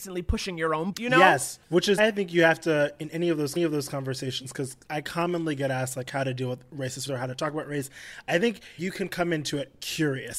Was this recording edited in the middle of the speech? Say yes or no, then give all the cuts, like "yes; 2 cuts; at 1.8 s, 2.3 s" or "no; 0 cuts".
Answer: yes; 7 cuts; at 0.9 s, 1.6 s, 2.0 s, 3.6 s, 4.8 s, 7.1 s, 8.8 s